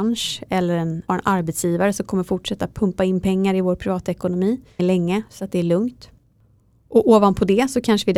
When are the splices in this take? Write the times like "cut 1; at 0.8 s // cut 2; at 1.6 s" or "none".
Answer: cut 1; at 1.1 s // cut 2; at 4.8 s